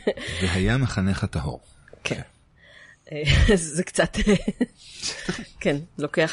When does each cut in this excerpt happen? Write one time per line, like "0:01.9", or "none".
none